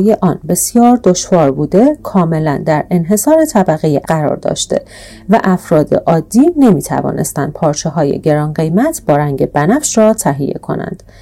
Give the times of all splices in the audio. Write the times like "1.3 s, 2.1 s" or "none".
4.0 s